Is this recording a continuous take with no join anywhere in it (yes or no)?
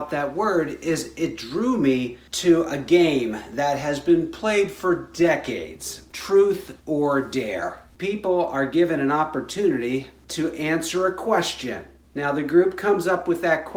yes